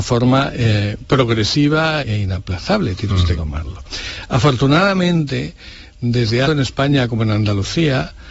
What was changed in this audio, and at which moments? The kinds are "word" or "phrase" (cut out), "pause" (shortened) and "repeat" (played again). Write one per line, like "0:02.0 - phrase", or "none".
0:02.0 - word
0:03.3 - word
0:06.4 - phrase